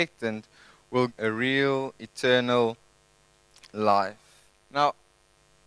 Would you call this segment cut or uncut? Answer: cut